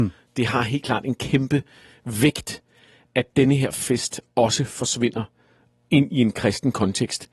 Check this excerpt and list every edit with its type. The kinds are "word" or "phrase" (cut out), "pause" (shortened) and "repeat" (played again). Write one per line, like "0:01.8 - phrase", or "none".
none